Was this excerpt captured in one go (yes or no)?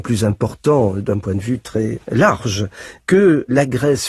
yes